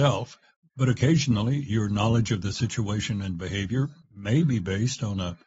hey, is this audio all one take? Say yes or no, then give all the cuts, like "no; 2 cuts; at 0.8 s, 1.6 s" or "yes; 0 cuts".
yes; 0 cuts